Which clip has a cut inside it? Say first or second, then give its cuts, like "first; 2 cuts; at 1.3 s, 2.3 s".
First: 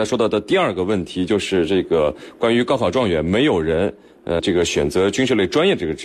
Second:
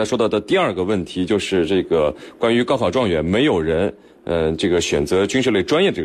first; 1 cut; at 4.4 s